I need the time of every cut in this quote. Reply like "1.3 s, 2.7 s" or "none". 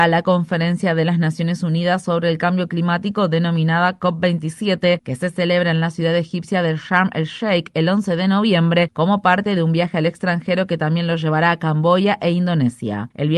none